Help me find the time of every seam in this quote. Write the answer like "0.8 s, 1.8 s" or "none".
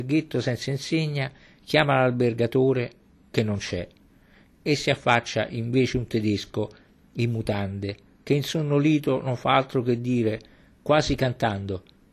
none